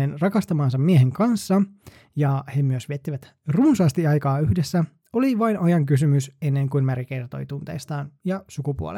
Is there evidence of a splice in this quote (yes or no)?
no